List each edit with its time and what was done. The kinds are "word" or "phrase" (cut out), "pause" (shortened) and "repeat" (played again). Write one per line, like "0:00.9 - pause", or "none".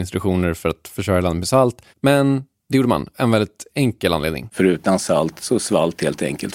0:01.9 - pause
0:03.1 - word